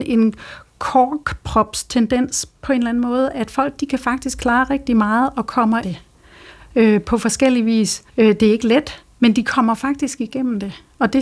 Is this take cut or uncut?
cut